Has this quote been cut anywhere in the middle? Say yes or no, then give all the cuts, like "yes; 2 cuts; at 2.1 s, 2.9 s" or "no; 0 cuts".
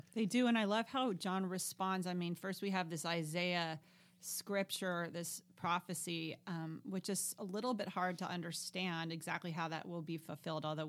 no; 0 cuts